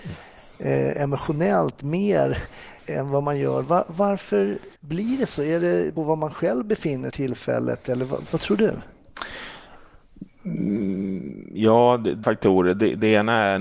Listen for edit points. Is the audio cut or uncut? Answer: cut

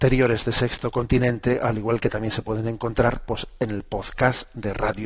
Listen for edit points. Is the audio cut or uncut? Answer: uncut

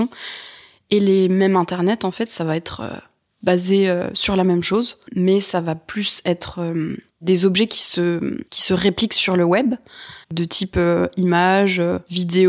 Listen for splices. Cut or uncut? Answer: cut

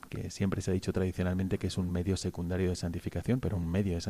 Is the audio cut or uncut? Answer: uncut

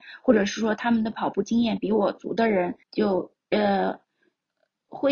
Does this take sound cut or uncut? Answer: cut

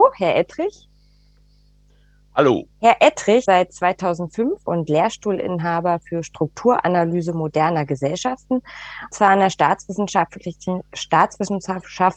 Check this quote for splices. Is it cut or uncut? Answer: cut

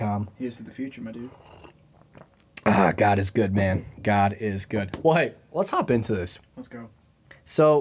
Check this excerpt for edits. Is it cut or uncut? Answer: uncut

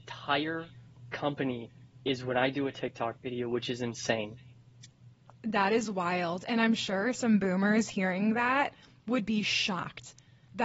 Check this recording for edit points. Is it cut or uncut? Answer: uncut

